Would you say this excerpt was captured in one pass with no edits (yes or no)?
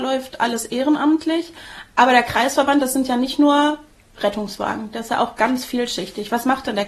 yes